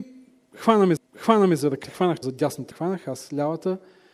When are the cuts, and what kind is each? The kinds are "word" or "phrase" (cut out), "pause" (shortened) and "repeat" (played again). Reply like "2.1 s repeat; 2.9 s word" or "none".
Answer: 1.0 s repeat; 1.8 s word; 2.2 s word; 2.7 s word